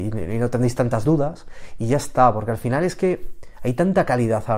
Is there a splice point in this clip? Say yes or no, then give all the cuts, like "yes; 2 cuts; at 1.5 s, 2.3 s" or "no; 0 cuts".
no; 0 cuts